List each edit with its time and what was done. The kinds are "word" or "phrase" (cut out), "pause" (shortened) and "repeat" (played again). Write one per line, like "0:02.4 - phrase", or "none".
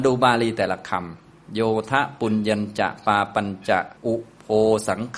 0:04.0 - pause

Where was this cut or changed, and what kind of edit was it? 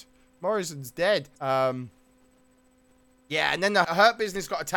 0:01.3 - pause
0:03.8 - word

